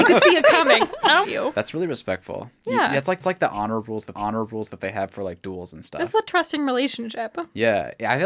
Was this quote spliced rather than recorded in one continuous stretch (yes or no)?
yes